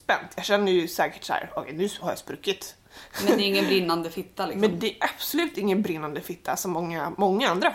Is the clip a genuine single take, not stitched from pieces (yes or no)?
yes